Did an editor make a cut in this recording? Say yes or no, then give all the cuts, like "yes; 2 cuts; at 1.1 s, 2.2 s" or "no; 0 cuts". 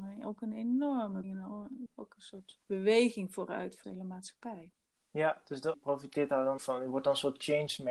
yes; 6 cuts; at 1.2 s, 1.9 s, 2.6 s, 3.8 s, 5.7 s, 6.6 s